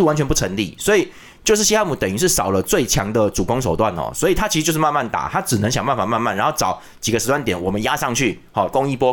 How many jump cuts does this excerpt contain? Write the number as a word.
zero